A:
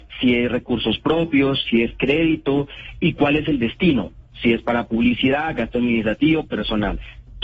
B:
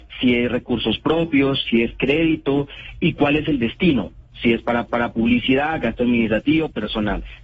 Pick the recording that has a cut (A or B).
B